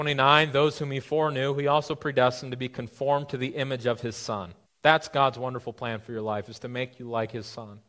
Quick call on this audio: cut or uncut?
cut